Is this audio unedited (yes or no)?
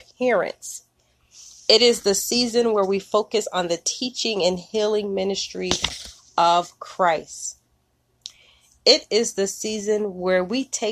yes